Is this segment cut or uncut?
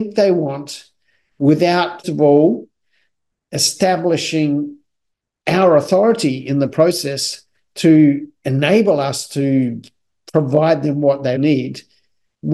cut